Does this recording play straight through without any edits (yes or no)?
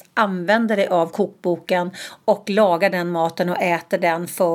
yes